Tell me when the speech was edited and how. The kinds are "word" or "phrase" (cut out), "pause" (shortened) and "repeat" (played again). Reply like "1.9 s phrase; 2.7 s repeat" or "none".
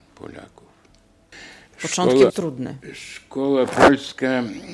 2.3 s phrase